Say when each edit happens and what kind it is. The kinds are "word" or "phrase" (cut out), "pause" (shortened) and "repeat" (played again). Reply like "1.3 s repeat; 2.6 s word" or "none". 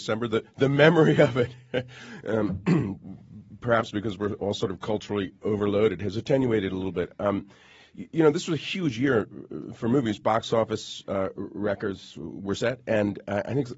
none